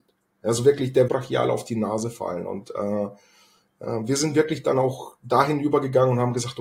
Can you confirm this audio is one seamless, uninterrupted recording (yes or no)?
no